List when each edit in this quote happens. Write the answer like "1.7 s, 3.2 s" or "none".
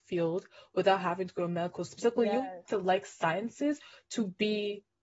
1.9 s, 2.7 s